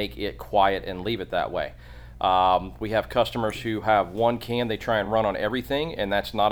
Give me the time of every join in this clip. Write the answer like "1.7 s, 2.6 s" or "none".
none